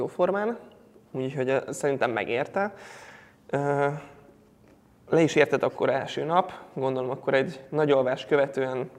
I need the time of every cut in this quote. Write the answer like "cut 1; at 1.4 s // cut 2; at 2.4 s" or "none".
none

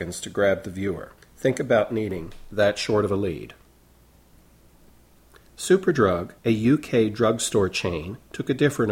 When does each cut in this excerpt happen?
cut 1; at 1.2 s // cut 2; at 6.4 s

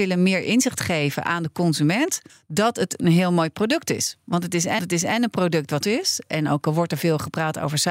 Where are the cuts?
cut 1; at 2.3 s // cut 2; at 4.8 s // cut 3; at 5.8 s

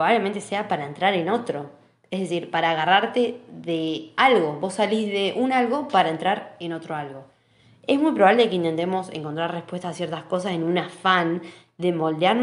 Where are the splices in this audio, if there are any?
none

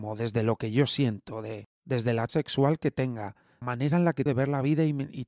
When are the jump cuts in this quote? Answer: cut 1; at 1.8 s // cut 2; at 2.3 s // cut 3; at 3.6 s // cut 4; at 4.3 s

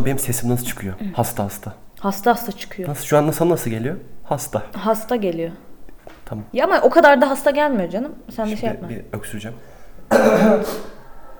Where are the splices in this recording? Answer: cut 1; at 6.5 s

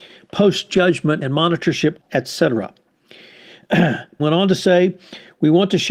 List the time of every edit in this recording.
cut 1; at 1.2 s // cut 2; at 2.0 s // cut 3; at 4.2 s

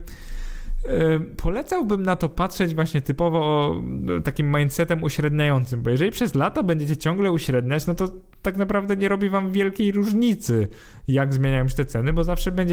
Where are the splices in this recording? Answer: none

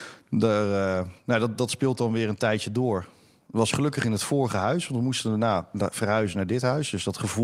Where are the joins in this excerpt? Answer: none

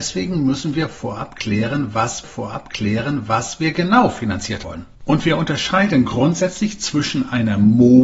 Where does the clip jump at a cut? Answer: cut 1; at 2.2 s // cut 2; at 4.6 s // cut 3; at 4.9 s

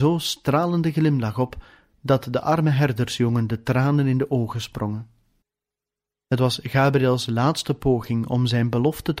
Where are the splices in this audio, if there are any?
cut 1; at 5.4 s

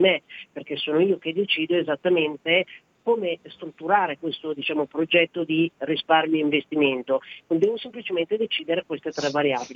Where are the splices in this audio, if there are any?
none

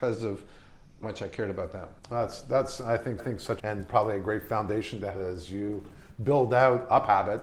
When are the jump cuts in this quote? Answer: cut 1; at 1.0 s // cut 2; at 2.0 s // cut 3; at 3.2 s // cut 4; at 3.6 s // cut 5; at 5.1 s

